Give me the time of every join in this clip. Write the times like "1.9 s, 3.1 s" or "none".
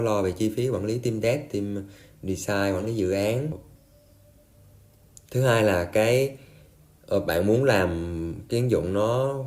none

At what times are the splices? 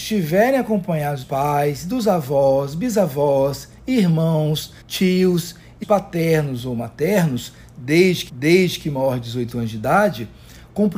1.2 s, 4.8 s, 5.8 s, 8.3 s

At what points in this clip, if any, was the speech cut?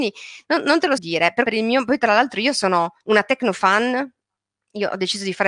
1.0 s, 1.5 s, 3.0 s

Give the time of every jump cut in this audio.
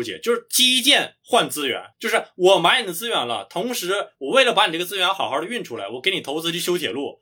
1.9 s

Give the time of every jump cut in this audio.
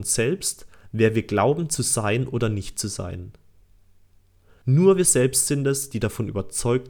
none

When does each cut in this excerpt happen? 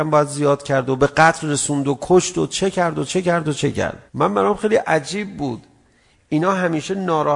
4.1 s

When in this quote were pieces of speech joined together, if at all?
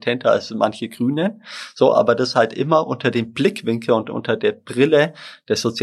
none

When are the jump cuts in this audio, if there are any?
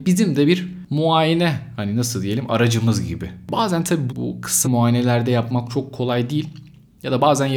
4.1 s, 4.6 s

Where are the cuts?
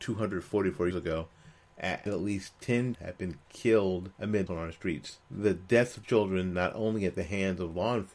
0.9 s, 2.1 s, 2.9 s, 4.1 s, 4.5 s, 5.2 s, 6.0 s

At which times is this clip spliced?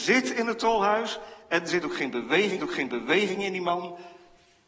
2.6 s

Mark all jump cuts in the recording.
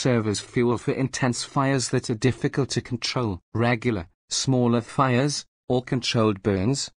none

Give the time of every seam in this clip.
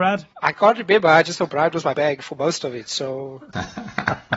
1.2 s, 1.9 s

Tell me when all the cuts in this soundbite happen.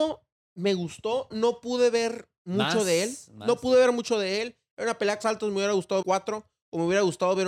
1.3 s, 5.2 s, 6.0 s

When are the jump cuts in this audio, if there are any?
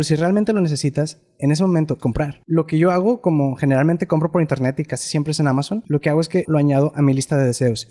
2.0 s, 6.4 s

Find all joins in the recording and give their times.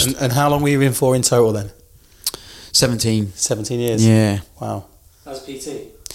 none

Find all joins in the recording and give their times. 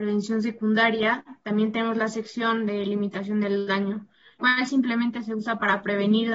4.4 s

